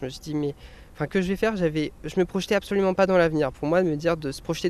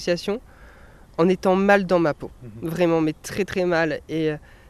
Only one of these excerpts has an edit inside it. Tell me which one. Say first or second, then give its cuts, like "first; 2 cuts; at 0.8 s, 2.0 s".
first; 1 cut; at 1.1 s